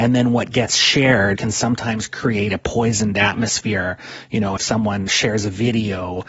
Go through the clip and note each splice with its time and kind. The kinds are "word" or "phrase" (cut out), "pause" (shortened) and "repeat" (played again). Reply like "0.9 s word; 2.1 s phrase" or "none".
1.4 s word; 4.6 s word; 5.1 s word